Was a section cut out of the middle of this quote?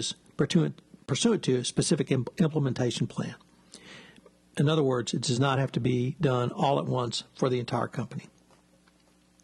no; 0 cuts

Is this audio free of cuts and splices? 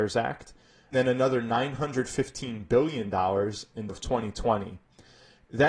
no; 2 cuts; at 0.9 s, 3.9 s

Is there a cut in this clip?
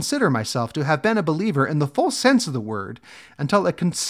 no; 0 cuts

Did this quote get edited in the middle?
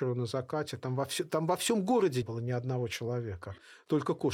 yes; 1 cut; at 2.2 s

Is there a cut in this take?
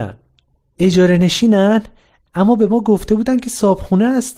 no; 0 cuts

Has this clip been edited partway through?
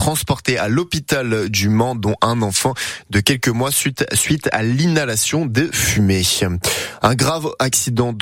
no; 0 cuts

